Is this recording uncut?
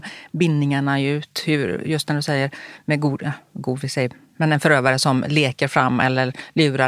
yes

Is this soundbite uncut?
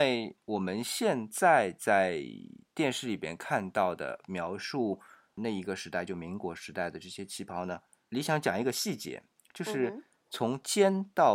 yes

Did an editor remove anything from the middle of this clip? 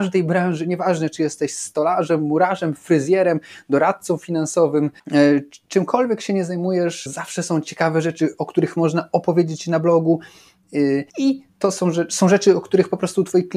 yes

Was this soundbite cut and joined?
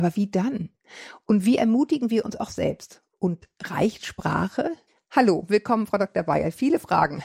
no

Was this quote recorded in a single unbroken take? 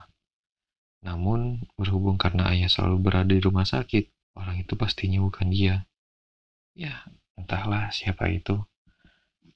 no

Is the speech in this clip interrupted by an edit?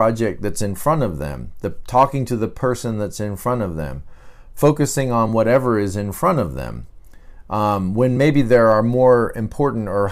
no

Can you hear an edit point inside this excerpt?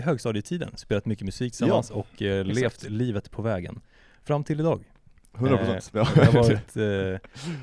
no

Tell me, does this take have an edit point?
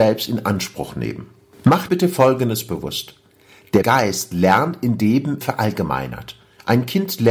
yes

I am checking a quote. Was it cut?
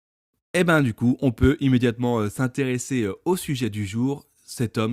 no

